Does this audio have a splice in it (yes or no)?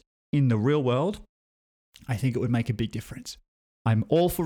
no